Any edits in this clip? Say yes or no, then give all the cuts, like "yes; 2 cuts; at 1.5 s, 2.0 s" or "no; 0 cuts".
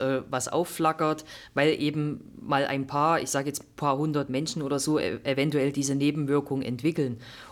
no; 0 cuts